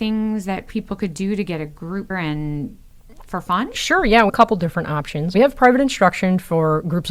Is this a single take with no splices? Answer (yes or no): no